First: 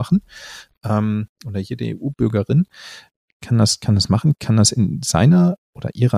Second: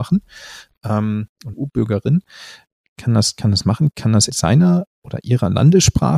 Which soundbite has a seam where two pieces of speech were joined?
second; 2 cuts; at 1.5 s, 4.3 s

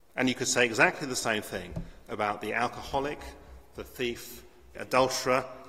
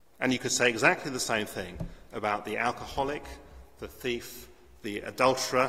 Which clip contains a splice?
first; 1 cut; at 4.7 s

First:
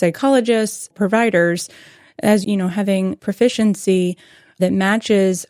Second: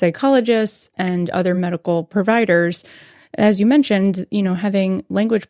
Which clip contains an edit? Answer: first; 3 cuts; at 0.9 s, 2.4 s, 3.2 s

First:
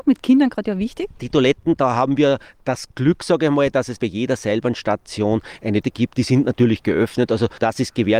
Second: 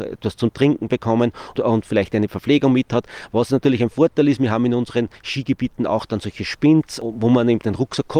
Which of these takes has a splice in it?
first; 2 cuts; at 4.0 s, 5.8 s

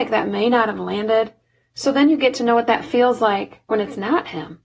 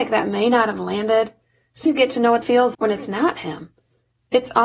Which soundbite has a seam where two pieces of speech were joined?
second; 3 cuts; at 1.9 s, 2.4 s, 2.7 s

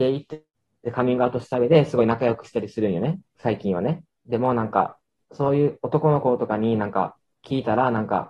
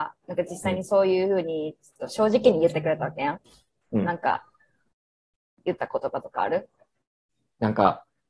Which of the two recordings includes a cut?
first; 2 cuts; at 3.3 s, 5.2 s

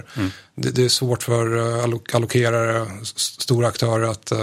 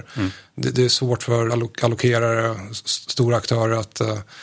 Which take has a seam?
second; 1 cut; at 1.5 s

